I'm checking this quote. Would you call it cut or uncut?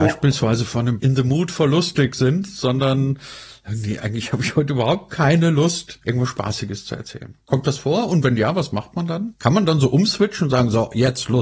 cut